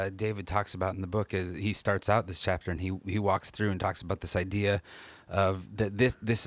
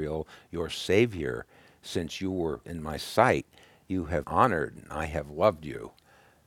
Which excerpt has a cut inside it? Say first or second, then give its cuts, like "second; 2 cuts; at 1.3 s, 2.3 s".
second; 2 cuts; at 2.6 s, 4.2 s